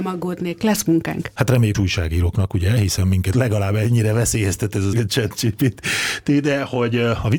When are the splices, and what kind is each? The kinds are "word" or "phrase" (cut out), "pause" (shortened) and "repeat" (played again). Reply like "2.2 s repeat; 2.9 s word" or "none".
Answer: 1.7 s phrase; 3.3 s word; 4.9 s phrase